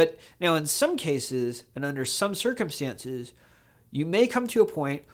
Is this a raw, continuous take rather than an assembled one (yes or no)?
yes